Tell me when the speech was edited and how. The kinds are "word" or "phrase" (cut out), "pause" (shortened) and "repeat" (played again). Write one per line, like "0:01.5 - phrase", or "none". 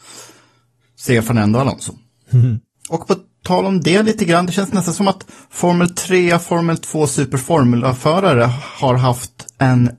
none